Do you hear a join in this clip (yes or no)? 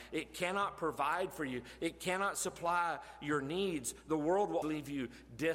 yes